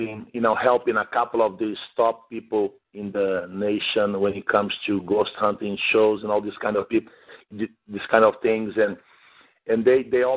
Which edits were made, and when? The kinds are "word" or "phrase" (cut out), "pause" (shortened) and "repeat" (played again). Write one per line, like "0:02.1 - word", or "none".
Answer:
none